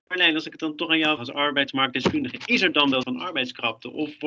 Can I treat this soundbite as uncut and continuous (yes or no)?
no